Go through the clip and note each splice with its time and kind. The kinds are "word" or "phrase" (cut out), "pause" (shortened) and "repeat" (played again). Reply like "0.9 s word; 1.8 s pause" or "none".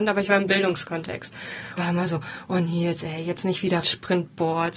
1.8 s word; 3.8 s phrase